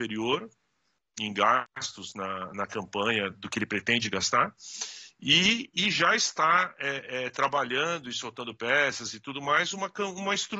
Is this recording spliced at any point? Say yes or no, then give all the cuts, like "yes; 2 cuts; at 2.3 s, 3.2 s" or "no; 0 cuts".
no; 0 cuts